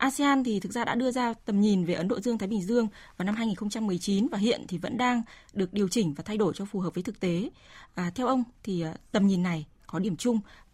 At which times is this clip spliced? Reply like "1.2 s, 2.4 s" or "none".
none